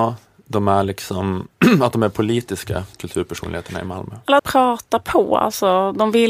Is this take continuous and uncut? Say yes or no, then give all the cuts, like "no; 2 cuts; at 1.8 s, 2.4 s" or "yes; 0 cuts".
no; 2 cuts; at 2.9 s, 4.4 s